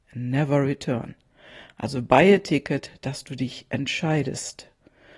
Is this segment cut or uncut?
uncut